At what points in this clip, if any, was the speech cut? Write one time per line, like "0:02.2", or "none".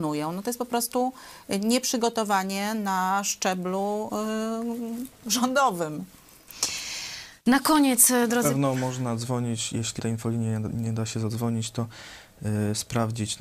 0:07.4
0:10.0